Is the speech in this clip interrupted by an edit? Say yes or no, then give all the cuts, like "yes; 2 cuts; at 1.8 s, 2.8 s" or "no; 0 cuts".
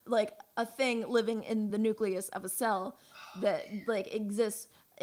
no; 0 cuts